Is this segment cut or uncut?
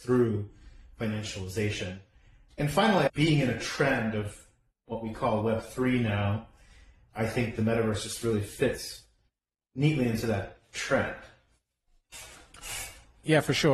uncut